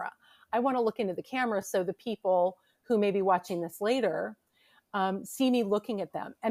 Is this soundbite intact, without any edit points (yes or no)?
yes